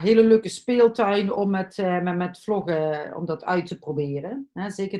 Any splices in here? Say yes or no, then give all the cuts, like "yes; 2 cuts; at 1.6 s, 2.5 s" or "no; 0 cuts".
no; 0 cuts